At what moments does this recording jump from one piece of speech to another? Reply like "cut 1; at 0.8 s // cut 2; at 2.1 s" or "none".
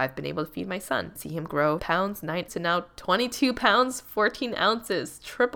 cut 1; at 1.2 s // cut 2; at 1.8 s // cut 3; at 2.5 s